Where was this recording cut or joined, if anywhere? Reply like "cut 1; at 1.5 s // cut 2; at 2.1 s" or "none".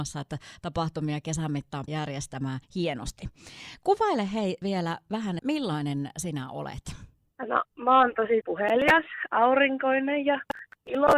cut 1; at 1.9 s // cut 2; at 2.6 s // cut 3; at 4.6 s // cut 4; at 5.4 s // cut 5; at 7.3 s // cut 6; at 8.4 s